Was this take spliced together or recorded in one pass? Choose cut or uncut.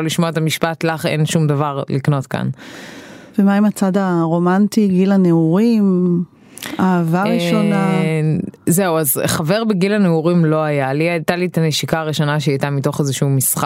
uncut